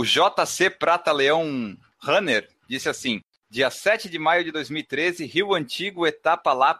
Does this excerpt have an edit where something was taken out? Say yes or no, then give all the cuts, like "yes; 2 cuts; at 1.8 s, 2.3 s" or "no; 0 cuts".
no; 0 cuts